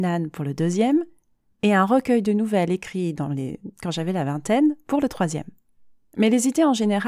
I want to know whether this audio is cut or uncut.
uncut